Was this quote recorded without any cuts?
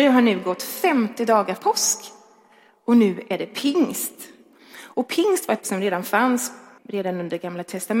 no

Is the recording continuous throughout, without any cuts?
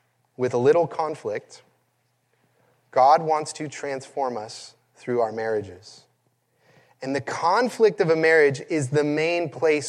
yes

